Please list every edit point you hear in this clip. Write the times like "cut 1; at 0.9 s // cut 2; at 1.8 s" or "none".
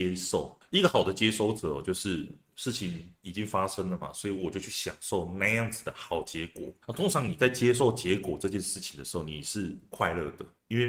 cut 1; at 6.8 s